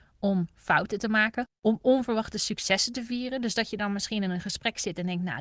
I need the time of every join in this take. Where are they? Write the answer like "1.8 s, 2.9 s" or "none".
1.5 s